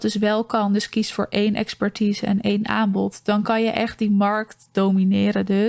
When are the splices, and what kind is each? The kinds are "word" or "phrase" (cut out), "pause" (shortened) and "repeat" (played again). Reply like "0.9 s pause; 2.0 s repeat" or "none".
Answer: none